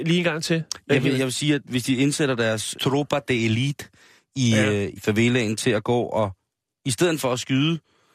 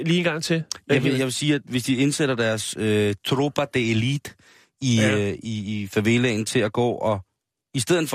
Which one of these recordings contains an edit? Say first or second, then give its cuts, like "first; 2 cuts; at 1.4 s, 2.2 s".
first; 2 cuts; at 2.7 s, 5.0 s